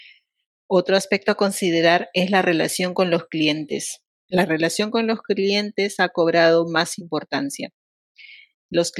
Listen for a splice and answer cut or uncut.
cut